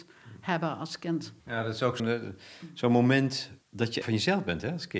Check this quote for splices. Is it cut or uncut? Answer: cut